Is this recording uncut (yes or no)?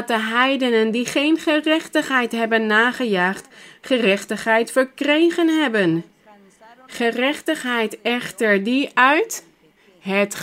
yes